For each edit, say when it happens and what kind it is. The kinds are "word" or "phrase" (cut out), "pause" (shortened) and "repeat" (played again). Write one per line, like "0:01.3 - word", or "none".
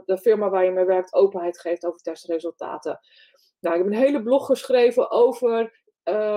none